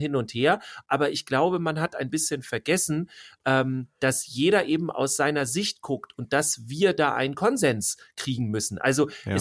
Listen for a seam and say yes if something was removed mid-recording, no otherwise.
no